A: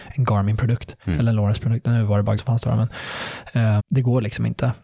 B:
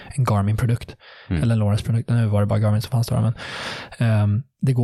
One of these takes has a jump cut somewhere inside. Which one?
A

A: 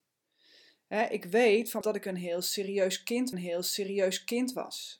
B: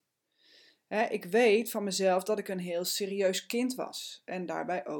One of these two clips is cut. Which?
A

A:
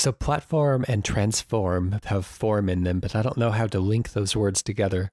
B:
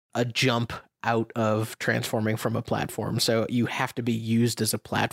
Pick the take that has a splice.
A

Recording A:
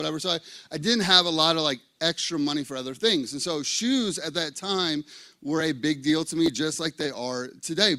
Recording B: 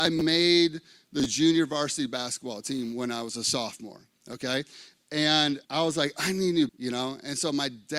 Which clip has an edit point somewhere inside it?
B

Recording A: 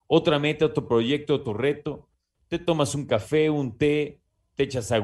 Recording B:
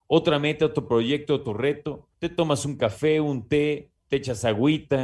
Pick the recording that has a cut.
B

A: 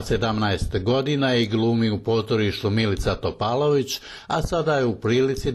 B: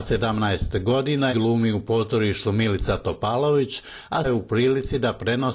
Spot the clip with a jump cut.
B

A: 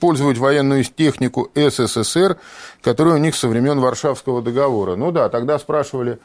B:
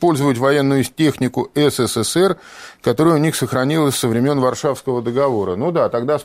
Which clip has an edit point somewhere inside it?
A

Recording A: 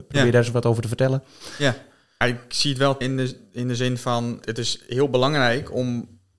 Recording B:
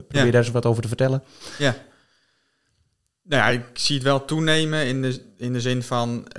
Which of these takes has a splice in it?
A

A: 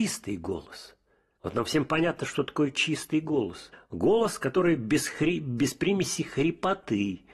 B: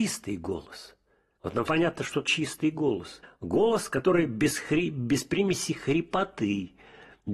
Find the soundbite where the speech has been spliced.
B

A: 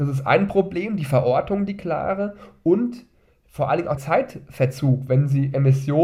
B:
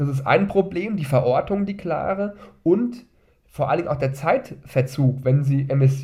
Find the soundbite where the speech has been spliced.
A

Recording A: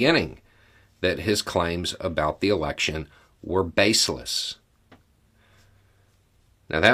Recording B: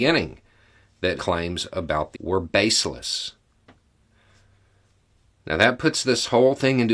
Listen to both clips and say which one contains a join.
B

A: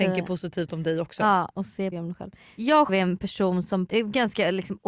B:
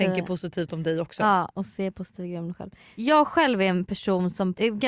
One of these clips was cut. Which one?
A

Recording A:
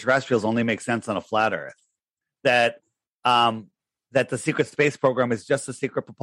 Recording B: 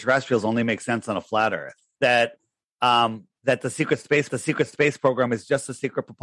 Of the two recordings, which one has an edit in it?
B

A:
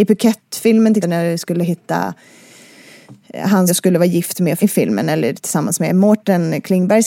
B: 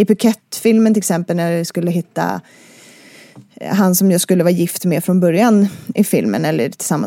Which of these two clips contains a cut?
A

